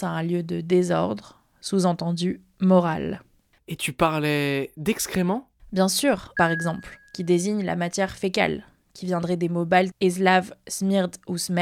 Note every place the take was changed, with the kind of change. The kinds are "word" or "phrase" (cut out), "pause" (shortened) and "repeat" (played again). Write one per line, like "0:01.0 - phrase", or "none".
0:06.4 - word